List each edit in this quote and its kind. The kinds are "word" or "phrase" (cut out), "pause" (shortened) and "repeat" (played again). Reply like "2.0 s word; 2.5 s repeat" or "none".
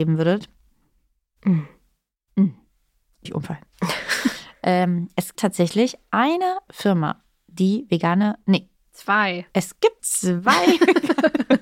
3.3 s word; 5.3 s word; 6.7 s word; 10.0 s word